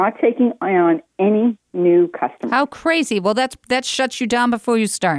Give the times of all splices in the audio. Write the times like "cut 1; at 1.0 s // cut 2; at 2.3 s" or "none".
none